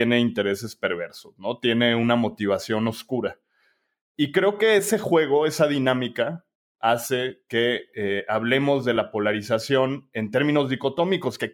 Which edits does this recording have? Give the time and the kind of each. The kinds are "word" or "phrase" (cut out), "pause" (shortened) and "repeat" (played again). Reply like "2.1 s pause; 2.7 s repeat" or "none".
none